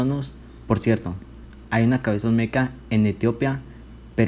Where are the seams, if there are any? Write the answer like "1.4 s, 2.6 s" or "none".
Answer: none